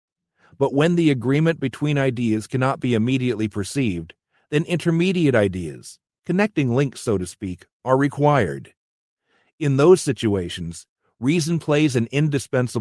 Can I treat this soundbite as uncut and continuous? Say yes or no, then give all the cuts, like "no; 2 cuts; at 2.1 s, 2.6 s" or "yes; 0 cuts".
yes; 0 cuts